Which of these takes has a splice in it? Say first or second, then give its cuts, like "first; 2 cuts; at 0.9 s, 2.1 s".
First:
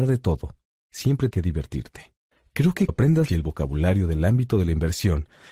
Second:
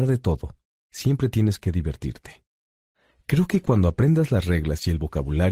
first; 4 cuts; at 1.3 s, 2.3 s, 2.9 s, 3.3 s